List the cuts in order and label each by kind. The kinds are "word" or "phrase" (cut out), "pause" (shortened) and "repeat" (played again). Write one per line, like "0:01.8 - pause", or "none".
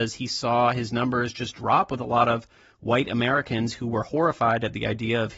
none

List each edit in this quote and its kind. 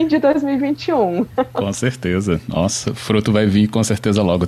none

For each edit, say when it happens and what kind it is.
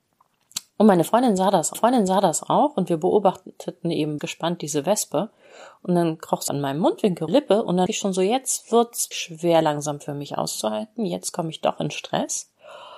0:01.7 - repeat
0:04.2 - phrase
0:06.5 - word
0:07.3 - phrase
0:07.9 - word
0:09.1 - word

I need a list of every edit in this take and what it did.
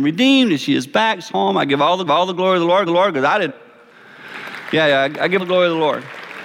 0:01.3 - word
0:02.1 - repeat
0:02.9 - repeat
0:03.5 - word
0:05.4 - word

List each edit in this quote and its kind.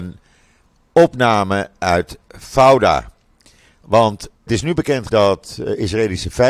0:04.5 - word
0:05.1 - word

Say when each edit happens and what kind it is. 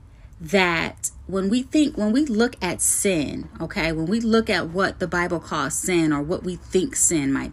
none

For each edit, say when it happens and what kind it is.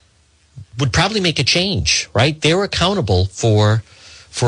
none

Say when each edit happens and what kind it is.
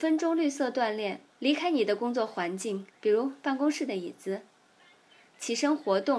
0:01.3 - pause
0:02.9 - pause

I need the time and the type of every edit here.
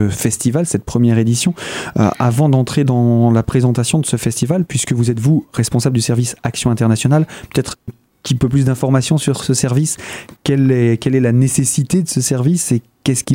0:07.9 - word

